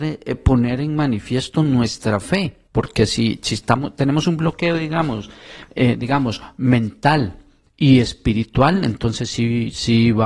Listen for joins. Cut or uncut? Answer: cut